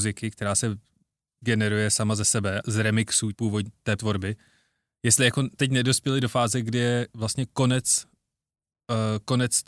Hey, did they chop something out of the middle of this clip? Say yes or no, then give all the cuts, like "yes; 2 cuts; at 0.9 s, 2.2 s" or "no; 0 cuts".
yes; 4 cuts; at 2.6 s, 3.3 s, 4.0 s, 5.6 s